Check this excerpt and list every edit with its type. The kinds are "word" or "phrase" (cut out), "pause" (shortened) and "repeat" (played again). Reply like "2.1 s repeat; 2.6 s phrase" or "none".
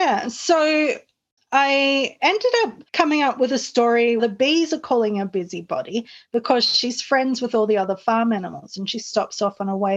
1.4 s word; 2.9 s pause; 4.2 s phrase